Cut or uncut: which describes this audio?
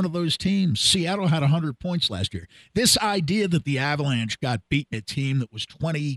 cut